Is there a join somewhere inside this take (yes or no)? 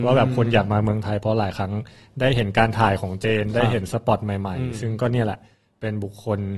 no